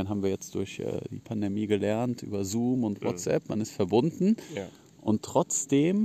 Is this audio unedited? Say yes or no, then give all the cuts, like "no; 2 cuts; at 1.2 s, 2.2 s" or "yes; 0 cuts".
yes; 0 cuts